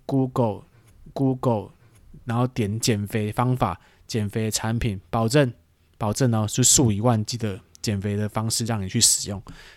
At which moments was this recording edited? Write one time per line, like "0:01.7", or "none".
0:01.1